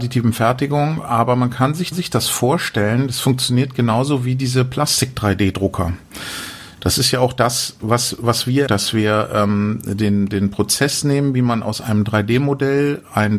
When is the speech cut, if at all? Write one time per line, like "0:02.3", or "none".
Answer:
0:01.9
0:06.7
0:08.7